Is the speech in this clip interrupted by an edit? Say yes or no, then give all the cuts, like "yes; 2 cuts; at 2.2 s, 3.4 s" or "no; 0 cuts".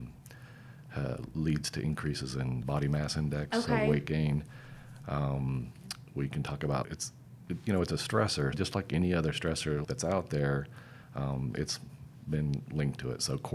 yes; 4 cuts; at 2.6 s, 6.8 s, 8.5 s, 9.8 s